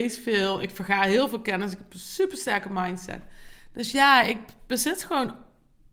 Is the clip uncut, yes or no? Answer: yes